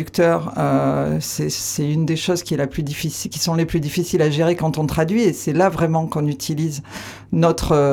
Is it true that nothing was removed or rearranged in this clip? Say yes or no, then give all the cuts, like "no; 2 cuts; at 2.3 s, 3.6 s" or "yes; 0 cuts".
yes; 0 cuts